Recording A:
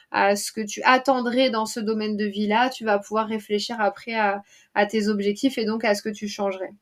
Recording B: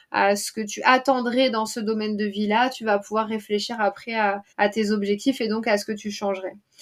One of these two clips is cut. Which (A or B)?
B